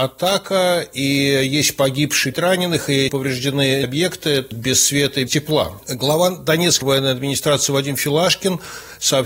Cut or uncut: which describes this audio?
cut